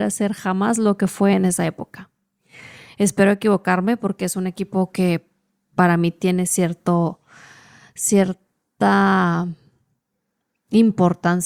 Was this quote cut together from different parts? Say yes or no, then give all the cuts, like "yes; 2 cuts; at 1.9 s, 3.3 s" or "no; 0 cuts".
no; 0 cuts